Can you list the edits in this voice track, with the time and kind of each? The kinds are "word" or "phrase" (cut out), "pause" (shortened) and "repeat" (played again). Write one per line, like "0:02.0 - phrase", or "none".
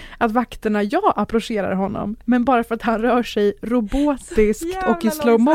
none